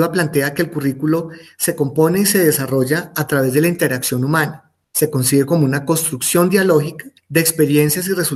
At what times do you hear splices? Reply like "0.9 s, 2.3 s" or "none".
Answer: none